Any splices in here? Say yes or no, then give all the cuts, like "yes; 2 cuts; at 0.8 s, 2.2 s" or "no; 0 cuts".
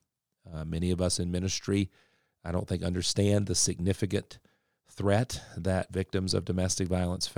no; 0 cuts